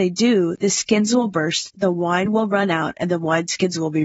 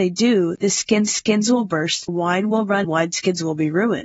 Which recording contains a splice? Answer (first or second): second